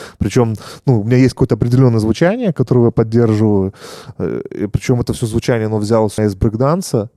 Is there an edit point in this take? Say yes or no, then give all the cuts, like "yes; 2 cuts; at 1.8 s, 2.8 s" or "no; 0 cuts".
yes; 1 cut; at 6.2 s